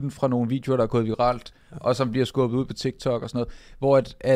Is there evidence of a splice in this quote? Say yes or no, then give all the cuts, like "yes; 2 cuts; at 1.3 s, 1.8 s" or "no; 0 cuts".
no; 0 cuts